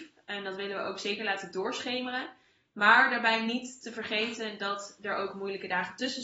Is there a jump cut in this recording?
no; 0 cuts

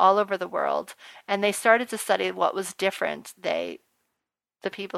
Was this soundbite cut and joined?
no; 0 cuts

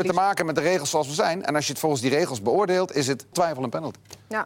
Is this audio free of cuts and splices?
no; 1 cut; at 3.3 s

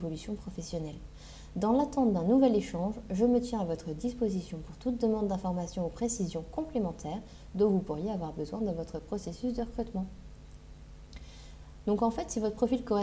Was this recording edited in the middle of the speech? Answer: no; 0 cuts

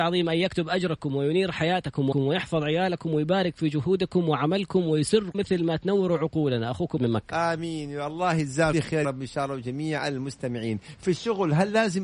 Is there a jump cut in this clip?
yes; 5 cuts; at 2.1 s, 5.3 s, 7.0 s, 8.7 s, 9.0 s

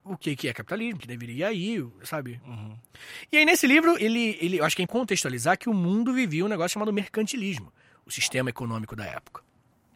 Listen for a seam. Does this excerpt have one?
yes; 3 cuts; at 1.0 s, 4.0 s, 4.9 s

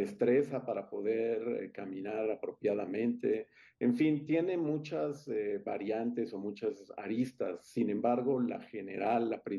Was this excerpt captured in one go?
yes; 0 cuts

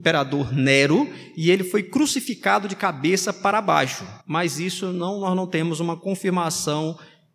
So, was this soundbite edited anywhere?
yes; 1 cut; at 4.2 s

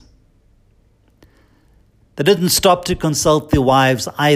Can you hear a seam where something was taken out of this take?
no; 0 cuts

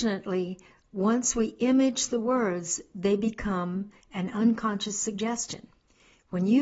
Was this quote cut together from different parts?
no; 0 cuts

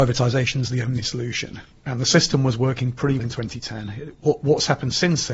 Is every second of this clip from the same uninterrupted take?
no; 1 cut; at 3.2 s

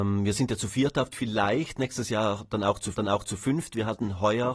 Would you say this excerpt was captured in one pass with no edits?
no; 2 cuts; at 1.1 s, 2.9 s

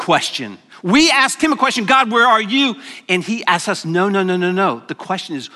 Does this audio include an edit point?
no; 0 cuts

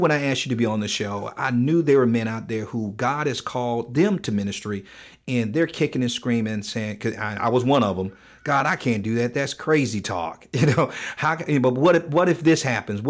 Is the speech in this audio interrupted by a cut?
no; 0 cuts

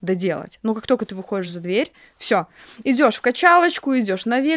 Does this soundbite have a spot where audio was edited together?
no; 0 cuts

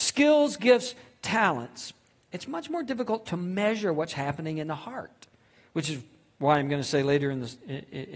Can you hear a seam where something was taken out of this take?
no; 0 cuts

